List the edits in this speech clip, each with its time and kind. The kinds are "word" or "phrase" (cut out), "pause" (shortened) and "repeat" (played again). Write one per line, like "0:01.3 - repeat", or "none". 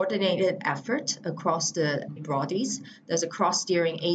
0:02.2 - word

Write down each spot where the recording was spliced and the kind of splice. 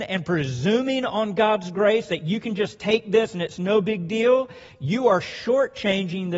none

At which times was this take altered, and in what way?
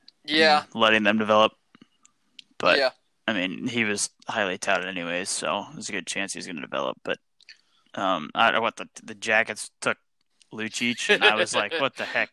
none

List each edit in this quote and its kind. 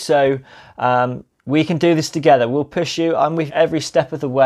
0:03.5 - word

